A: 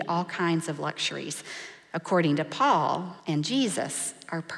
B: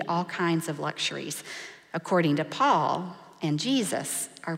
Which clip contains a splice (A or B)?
A